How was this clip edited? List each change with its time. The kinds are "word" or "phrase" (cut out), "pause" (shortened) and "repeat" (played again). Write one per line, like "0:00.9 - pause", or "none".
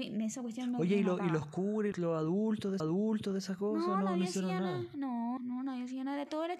0:01.9 - word
0:02.8 - repeat
0:05.4 - word